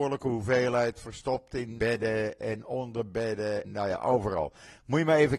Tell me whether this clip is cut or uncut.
cut